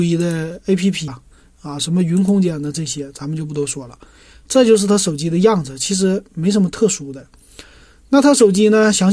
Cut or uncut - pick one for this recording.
cut